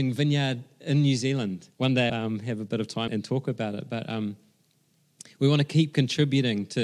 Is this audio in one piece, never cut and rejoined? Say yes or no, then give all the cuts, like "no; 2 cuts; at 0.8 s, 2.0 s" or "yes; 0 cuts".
no; 3 cuts; at 1.7 s, 2.1 s, 3.1 s